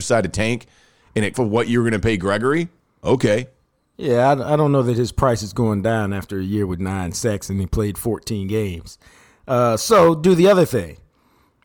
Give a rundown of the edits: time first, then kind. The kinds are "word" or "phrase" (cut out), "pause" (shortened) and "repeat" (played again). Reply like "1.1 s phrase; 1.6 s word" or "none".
1.3 s phrase